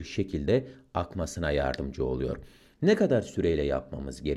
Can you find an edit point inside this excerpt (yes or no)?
no